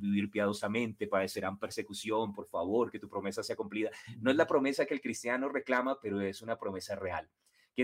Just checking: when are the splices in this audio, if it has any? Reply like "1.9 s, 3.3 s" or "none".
none